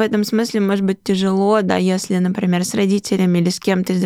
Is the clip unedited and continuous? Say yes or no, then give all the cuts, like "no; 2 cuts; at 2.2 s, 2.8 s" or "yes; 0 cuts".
yes; 0 cuts